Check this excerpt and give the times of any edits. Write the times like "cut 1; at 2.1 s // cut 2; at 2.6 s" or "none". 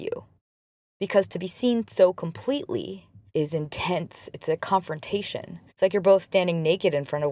cut 1; at 3.3 s // cut 2; at 5.7 s